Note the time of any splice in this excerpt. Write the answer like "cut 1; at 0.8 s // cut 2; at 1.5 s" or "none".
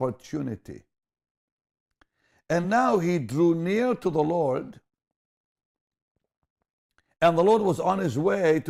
none